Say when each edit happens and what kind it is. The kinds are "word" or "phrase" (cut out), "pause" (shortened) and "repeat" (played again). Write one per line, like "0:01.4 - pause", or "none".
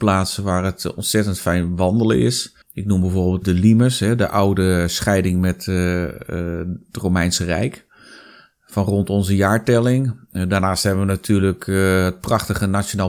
0:02.6 - pause
0:03.4 - word